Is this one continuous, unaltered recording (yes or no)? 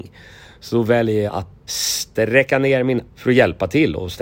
no